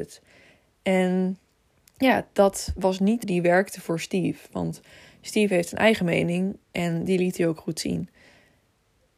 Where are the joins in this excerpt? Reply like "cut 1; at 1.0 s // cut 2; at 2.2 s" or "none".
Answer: cut 1; at 3.2 s

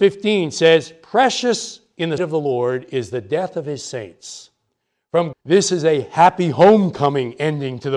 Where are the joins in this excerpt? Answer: cut 1; at 2.2 s // cut 2; at 5.3 s

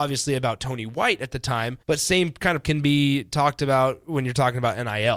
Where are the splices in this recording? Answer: cut 1; at 1.8 s // cut 2; at 2.6 s

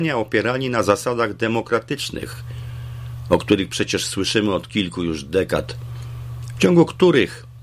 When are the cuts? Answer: none

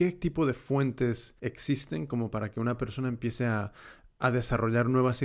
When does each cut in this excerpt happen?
cut 1; at 1.4 s // cut 2; at 4.1 s

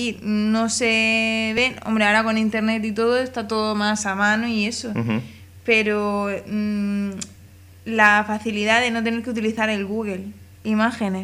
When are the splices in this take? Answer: none

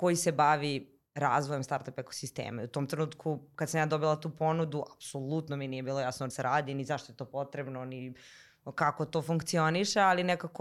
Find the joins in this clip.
cut 1; at 6.3 s

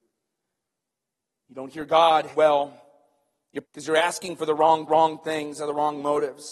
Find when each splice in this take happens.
cut 1; at 2.3 s // cut 2; at 3.6 s // cut 3; at 4.9 s

